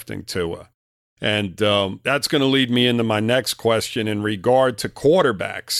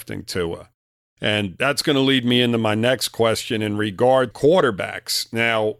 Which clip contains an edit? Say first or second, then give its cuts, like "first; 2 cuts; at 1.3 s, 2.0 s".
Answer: second; 2 cuts; at 1.6 s, 4.3 s